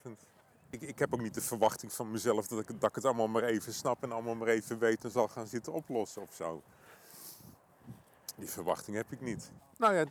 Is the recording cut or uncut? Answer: uncut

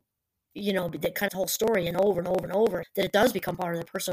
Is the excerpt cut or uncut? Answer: cut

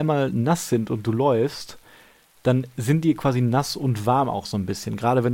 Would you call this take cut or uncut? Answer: uncut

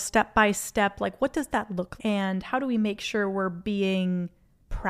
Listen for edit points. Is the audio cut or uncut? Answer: cut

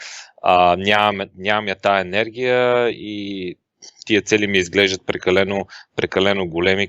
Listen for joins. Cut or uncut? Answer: uncut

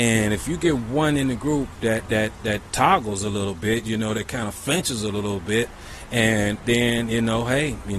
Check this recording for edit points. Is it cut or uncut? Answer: uncut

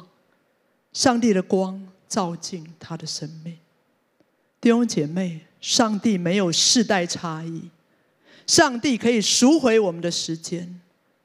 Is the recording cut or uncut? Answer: uncut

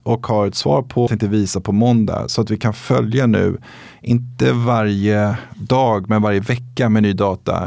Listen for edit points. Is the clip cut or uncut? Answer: cut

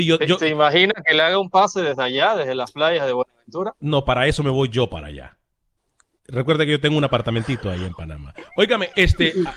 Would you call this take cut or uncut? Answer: uncut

